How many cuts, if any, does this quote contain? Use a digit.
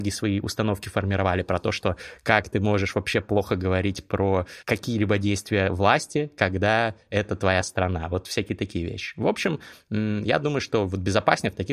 1